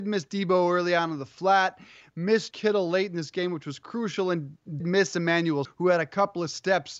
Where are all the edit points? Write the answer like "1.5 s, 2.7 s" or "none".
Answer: 2.5 s, 4.8 s, 5.6 s

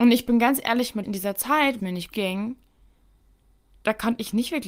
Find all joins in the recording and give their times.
1.0 s, 1.8 s, 2.1 s

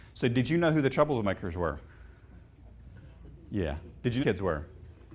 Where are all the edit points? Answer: 4.2 s

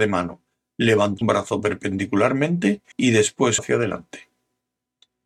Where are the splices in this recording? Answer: 1.2 s, 2.9 s, 3.6 s

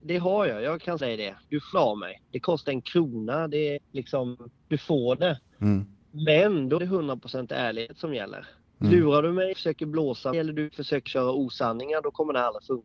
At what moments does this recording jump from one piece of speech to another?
1.0 s, 1.7 s, 2.6 s, 3.8 s, 6.8 s, 9.5 s, 10.3 s, 11.1 s

